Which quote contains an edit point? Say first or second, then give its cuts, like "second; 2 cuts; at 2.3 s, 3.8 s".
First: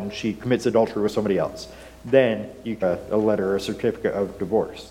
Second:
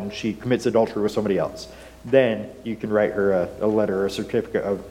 first; 1 cut; at 2.8 s